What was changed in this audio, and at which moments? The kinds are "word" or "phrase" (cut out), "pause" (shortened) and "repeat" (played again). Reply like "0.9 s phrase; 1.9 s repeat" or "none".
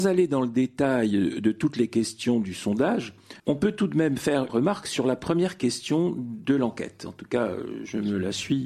3.4 s pause; 4.5 s word